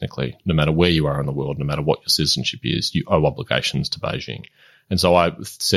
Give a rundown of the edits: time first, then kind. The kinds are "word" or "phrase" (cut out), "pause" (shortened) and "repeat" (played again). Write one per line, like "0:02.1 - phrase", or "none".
none